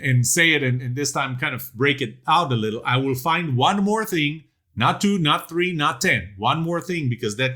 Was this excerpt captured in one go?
yes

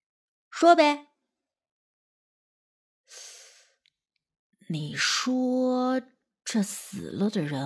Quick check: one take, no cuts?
yes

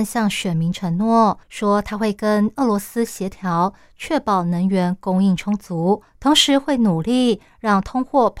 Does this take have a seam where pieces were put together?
yes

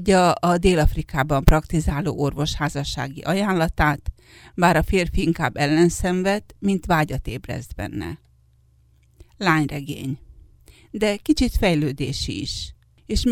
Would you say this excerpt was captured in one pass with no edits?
yes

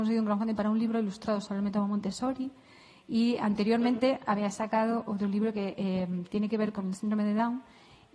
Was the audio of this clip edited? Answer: no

